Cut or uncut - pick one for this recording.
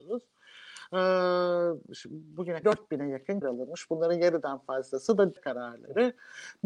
cut